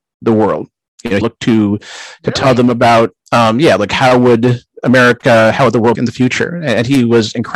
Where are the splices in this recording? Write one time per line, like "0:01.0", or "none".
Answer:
0:01.2
0:05.9